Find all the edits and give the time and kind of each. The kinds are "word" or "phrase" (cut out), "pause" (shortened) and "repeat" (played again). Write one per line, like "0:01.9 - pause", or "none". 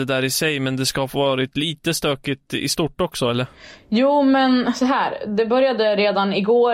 none